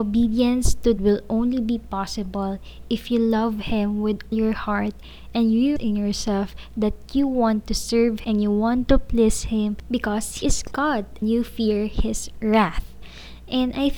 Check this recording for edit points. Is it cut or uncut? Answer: cut